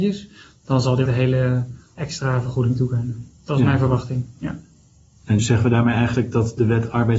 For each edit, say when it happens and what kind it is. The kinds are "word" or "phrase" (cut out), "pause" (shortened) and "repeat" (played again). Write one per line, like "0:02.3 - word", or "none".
0:01.1 - word
0:02.0 - word
0:05.4 - word